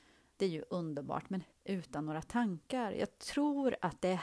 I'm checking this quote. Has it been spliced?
yes; 1 cut; at 1.5 s

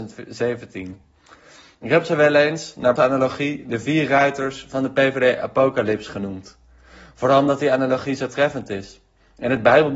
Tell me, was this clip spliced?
yes; 1 cut; at 3.0 s

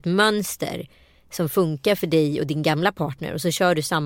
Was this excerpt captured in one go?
yes; 0 cuts

